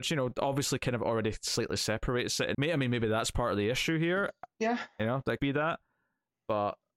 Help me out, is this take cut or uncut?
cut